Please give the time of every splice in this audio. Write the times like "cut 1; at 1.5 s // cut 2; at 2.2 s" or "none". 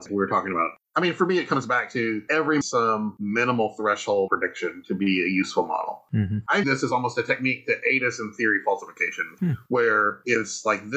cut 1; at 2.6 s // cut 2; at 4.3 s // cut 3; at 6.6 s

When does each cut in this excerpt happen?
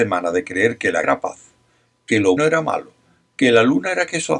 cut 1; at 1.0 s // cut 2; at 2.4 s

